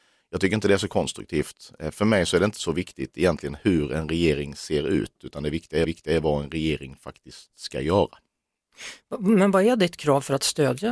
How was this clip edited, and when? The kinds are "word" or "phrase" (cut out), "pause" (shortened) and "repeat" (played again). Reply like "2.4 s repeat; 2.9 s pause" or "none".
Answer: 5.8 s repeat